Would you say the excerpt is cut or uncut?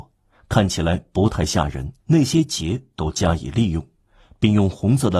cut